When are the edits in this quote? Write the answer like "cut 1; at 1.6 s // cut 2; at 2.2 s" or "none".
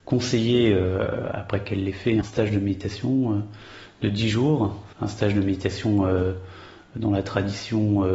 cut 1; at 2.2 s // cut 2; at 4.9 s